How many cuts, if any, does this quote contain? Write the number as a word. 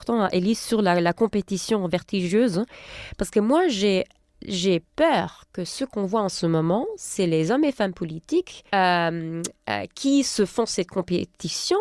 two